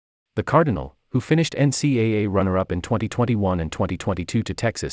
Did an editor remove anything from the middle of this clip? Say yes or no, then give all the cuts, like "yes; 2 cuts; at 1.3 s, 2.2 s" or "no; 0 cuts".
no; 0 cuts